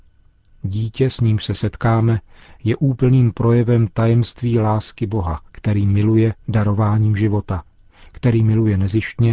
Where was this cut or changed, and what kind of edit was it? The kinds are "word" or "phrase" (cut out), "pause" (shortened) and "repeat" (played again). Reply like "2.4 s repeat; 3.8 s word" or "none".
5.5 s pause